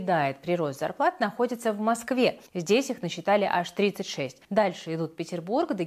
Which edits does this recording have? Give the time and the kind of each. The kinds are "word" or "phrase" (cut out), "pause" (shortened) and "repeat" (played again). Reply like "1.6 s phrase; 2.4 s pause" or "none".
2.5 s pause; 4.4 s pause

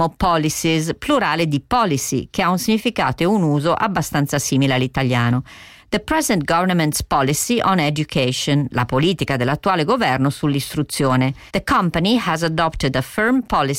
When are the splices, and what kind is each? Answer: 11.5 s pause

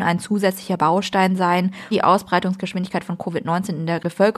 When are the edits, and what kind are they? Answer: 1.9 s word

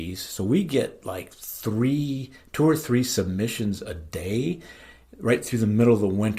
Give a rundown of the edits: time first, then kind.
none

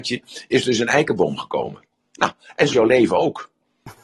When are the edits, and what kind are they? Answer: 2.7 s word

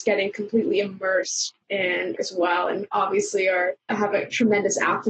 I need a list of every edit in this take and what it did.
2.2 s word; 3.9 s word

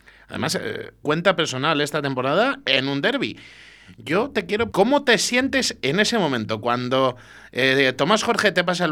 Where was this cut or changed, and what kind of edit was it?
1.0 s phrase; 2.6 s word; 4.7 s word

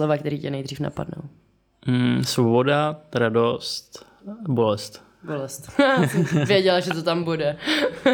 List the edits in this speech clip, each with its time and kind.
none

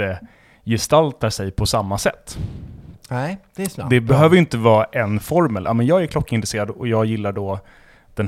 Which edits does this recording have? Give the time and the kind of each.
none

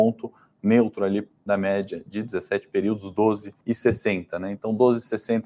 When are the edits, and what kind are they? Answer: 1.4 s word; 3.6 s pause

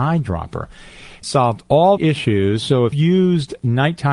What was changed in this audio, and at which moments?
1.2 s word; 2.0 s word; 2.9 s word

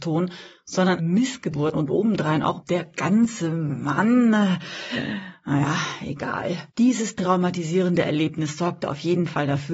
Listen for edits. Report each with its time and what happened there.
1.0 s word; 1.7 s word; 2.6 s phrase; 6.7 s pause

